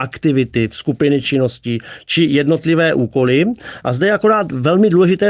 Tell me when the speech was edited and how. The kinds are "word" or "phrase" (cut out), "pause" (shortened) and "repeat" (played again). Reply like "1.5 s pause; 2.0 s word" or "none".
none